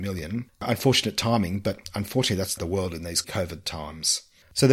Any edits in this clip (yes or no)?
yes